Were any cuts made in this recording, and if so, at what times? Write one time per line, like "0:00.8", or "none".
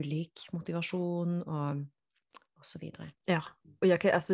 0:03.2